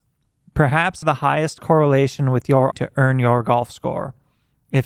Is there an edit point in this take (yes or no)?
yes